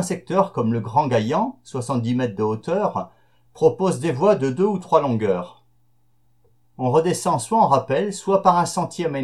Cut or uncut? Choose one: uncut